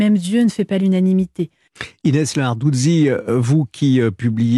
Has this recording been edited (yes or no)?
no